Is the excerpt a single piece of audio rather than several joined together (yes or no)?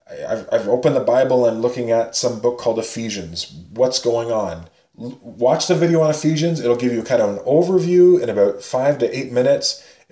yes